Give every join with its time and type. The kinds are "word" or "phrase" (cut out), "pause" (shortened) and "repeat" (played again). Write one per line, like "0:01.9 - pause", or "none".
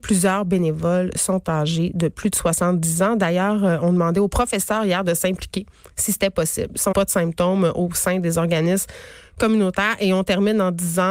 0:06.9 - word

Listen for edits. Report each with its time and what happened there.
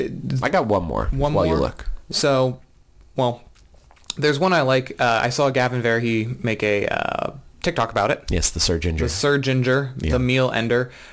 none

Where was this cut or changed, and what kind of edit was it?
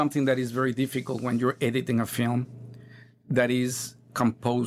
none

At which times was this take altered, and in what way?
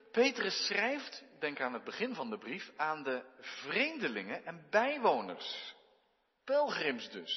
none

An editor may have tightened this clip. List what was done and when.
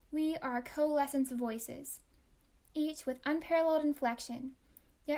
none

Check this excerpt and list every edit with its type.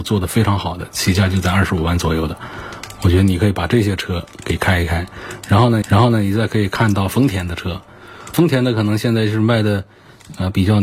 0:04.3 - pause
0:05.8 - repeat
0:08.3 - word

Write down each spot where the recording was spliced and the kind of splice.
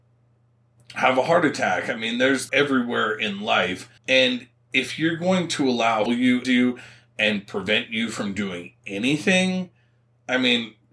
0:02.5 - phrase
0:04.0 - pause
0:06.1 - phrase
0:06.4 - phrase

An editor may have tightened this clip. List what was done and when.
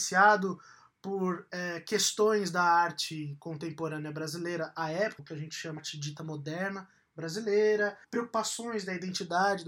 0:05.2 - word
0:05.8 - word
0:08.0 - pause

